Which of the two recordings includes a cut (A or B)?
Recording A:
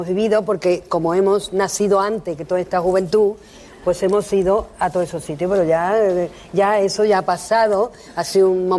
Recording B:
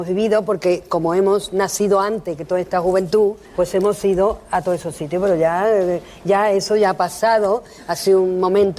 B